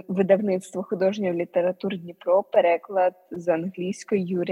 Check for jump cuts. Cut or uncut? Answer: uncut